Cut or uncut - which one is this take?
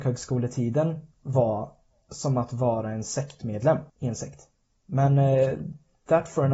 cut